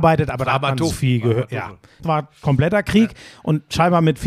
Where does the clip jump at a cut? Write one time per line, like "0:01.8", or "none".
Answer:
0:00.9
0:02.0